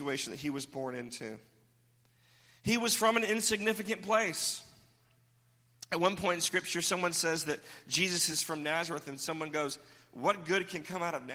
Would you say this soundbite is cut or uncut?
uncut